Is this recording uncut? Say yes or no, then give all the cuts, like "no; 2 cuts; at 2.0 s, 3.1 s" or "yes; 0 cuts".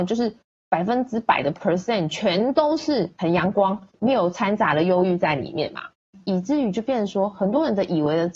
yes; 0 cuts